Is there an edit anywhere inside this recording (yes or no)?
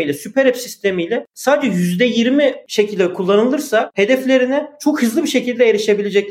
no